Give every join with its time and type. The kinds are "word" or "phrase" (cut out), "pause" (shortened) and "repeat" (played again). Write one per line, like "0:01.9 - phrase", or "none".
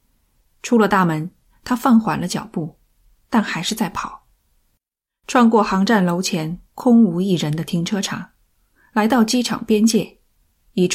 none